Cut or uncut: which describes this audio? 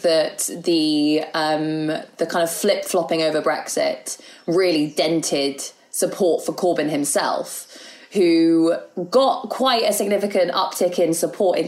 uncut